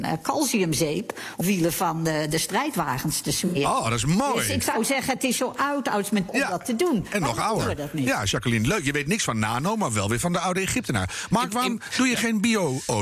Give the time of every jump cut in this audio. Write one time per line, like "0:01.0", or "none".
0:01.4
0:06.3